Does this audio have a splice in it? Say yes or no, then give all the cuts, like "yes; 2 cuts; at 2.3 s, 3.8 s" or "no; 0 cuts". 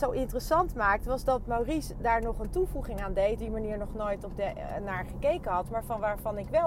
yes; 1 cut; at 3.4 s